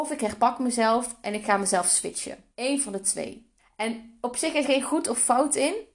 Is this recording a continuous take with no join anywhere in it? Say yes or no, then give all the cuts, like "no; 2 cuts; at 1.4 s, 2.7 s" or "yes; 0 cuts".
no; 3 cuts; at 2.5 s, 3.6 s, 4.6 s